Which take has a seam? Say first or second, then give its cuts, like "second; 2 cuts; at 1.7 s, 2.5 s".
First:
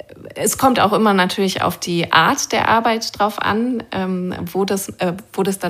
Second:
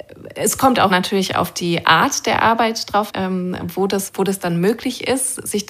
second; 3 cuts; at 0.9 s, 3.1 s, 4.1 s